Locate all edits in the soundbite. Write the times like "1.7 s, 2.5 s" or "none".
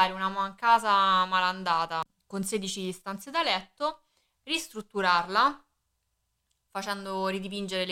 none